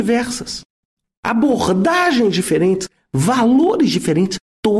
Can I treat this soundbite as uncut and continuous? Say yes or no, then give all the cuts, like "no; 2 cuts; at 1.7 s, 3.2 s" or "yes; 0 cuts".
yes; 0 cuts